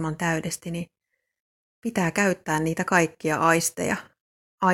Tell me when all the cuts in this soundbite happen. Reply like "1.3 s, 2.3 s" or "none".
none